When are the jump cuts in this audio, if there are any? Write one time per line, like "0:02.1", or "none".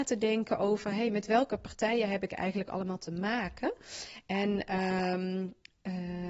none